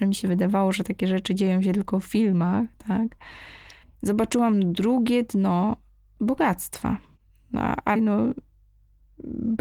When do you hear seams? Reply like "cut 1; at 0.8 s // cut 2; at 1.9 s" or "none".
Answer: cut 1; at 3.8 s // cut 2; at 8.0 s